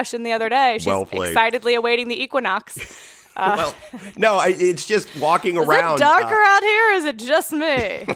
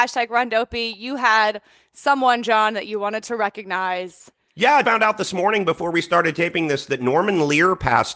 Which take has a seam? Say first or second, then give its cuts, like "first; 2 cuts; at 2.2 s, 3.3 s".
second; 1 cut; at 4.8 s